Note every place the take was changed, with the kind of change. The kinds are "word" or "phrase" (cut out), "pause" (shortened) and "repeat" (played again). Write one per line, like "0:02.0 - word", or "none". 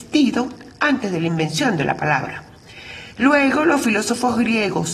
none